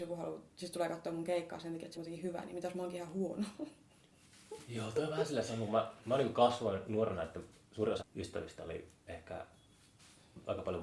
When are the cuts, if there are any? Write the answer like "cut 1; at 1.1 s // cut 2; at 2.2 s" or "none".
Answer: cut 1; at 1.9 s // cut 2; at 8.0 s